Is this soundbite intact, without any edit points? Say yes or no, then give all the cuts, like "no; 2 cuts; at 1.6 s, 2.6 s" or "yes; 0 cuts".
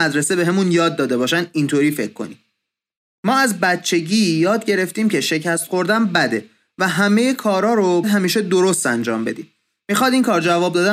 no; 1 cut; at 8.0 s